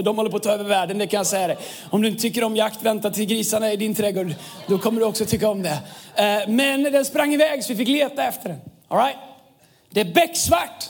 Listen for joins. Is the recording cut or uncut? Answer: uncut